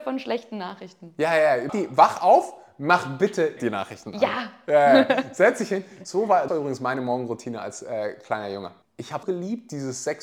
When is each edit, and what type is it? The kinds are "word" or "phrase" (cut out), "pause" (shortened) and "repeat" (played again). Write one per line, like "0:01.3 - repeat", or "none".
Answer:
0:01.7 - word
0:03.6 - word
0:06.5 - word
0:08.8 - pause
0:09.2 - word